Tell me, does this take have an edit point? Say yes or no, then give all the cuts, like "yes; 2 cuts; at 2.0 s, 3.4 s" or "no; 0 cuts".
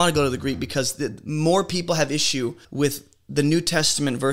yes; 1 cut; at 2.6 s